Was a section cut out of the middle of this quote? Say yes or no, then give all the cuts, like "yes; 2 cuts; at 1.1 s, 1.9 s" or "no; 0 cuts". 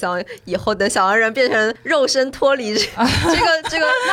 no; 0 cuts